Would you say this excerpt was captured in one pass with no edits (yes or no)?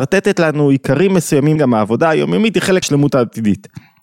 no